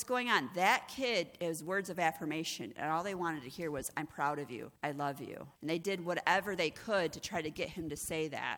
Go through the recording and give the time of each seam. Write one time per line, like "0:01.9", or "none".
0:04.8
0:05.6